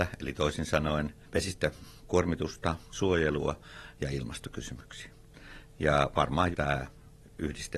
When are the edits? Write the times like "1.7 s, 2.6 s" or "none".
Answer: 2.9 s, 6.5 s

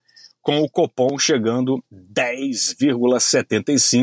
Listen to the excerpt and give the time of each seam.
1.9 s

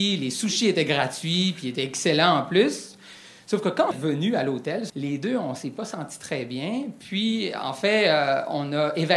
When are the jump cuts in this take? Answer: 3.9 s, 4.9 s

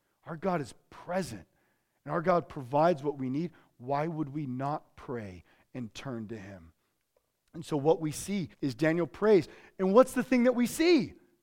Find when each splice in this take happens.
8.5 s

